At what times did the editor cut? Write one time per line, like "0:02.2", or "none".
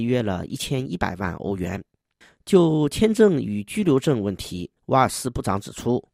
0:04.8